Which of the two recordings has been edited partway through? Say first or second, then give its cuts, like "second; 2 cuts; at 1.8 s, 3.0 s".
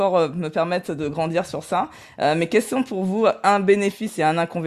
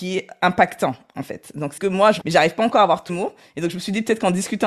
second; 3 cuts; at 1.8 s, 2.2 s, 3.1 s